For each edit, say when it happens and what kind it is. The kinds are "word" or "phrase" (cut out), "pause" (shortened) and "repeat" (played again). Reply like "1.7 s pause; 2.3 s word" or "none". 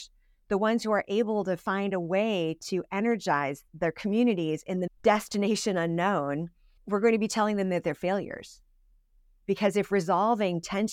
3.7 s pause; 4.9 s phrase; 6.8 s pause